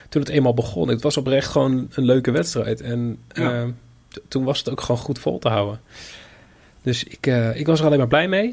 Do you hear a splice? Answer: no; 0 cuts

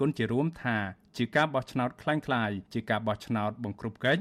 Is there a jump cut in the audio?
yes; 1 cut; at 2.7 s

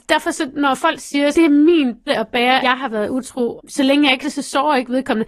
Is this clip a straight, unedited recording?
no; 5 cuts; at 1.3 s, 2.1 s, 2.6 s, 3.6 s, 4.2 s

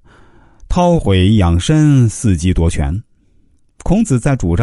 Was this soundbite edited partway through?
no; 0 cuts

